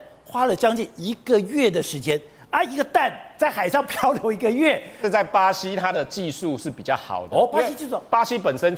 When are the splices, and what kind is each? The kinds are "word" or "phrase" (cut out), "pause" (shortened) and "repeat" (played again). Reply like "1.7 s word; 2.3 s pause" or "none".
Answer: none